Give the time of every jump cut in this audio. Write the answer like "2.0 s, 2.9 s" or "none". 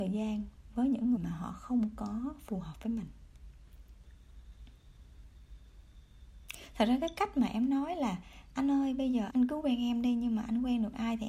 1.2 s, 9.3 s